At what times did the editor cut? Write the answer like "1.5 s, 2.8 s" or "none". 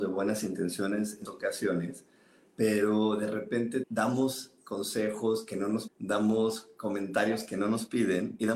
1.3 s, 3.8 s, 5.9 s

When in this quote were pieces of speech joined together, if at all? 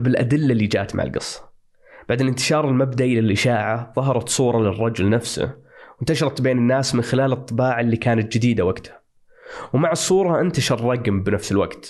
none

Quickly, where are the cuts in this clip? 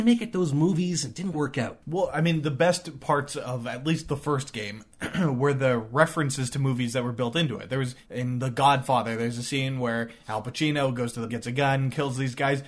1.3 s, 1.8 s, 8.0 s, 11.3 s

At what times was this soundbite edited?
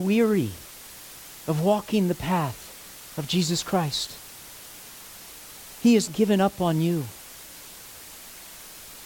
6.1 s

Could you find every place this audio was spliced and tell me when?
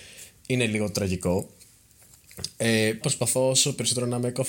3.0 s

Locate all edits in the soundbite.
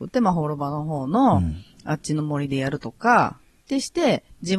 3.5 s

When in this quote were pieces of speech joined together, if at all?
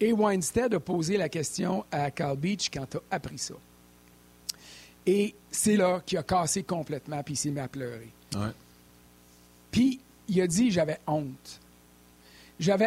2.7 s, 5.8 s

